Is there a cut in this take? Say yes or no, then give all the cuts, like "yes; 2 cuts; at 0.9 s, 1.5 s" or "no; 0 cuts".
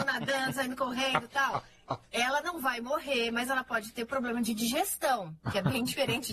no; 0 cuts